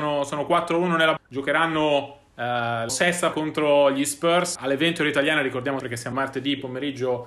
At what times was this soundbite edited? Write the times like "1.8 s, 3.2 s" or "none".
1.2 s, 2.9 s, 3.3 s, 4.6 s, 5.8 s, 6.1 s